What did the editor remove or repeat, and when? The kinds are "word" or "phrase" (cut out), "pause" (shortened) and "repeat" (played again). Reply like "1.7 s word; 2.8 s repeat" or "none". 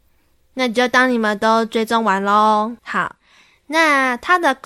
2.8 s pause